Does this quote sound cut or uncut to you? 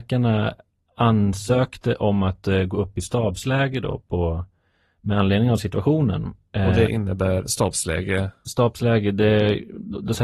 uncut